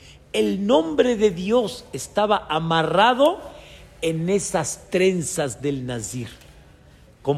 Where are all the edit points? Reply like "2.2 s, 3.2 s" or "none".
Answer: none